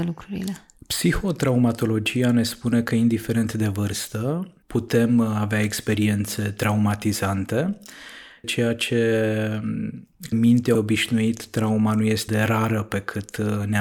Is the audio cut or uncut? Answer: cut